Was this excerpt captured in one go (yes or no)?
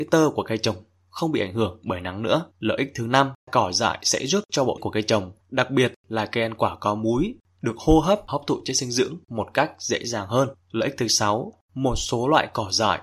no